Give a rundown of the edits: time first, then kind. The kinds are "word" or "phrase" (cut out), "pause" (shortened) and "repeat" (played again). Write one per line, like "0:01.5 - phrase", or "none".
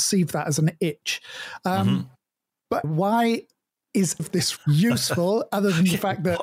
0:02.8 - word
0:04.2 - word
0:04.6 - word